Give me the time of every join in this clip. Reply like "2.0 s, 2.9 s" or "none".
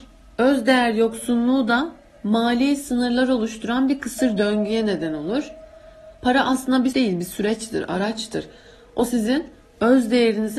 6.1 s, 6.9 s